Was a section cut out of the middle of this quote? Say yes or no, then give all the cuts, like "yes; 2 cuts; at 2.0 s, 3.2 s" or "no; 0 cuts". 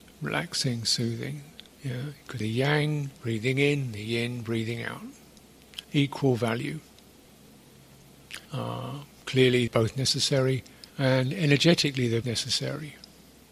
yes; 8 cuts; at 1.7 s, 2.4 s, 3.2 s, 5.8 s, 8.5 s, 9.7 s, 10.9 s, 12.2 s